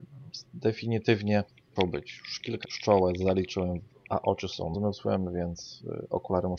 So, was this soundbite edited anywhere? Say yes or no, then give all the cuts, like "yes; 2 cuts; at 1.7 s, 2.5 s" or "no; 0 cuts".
yes; 4 cuts; at 1.8 s, 2.6 s, 4.1 s, 4.7 s